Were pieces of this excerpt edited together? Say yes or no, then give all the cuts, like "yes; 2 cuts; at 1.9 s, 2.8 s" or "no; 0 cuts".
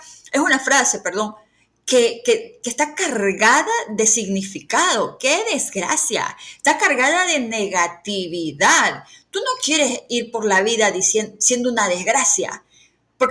no; 0 cuts